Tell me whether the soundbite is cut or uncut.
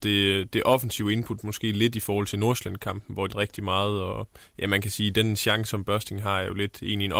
cut